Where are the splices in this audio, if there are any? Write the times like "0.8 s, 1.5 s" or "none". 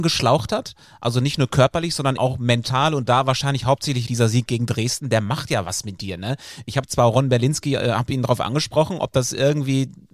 2.2 s, 4.1 s

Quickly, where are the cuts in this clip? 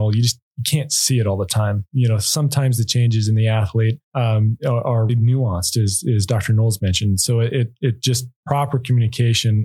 4.0 s, 5.1 s

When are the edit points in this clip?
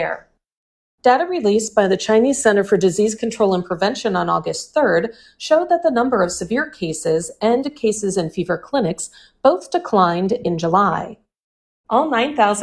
none

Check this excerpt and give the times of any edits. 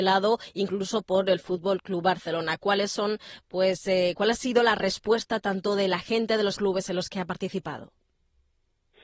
6.6 s

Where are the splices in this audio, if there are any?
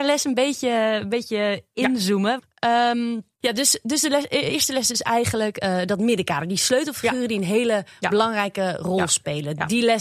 3.3 s

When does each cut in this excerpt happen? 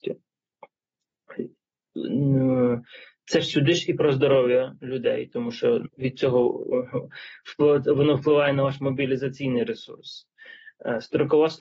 5.9 s

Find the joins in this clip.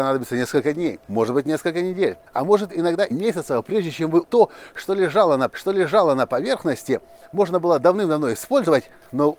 1.0 s, 2.3 s, 3.1 s, 4.2 s, 5.5 s

